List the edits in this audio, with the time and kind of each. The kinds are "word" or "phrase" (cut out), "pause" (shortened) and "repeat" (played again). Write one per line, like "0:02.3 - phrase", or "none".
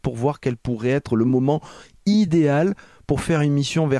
none